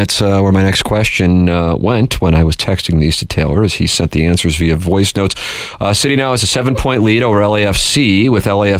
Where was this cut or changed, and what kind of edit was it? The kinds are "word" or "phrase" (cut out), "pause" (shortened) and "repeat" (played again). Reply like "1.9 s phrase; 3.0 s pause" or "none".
none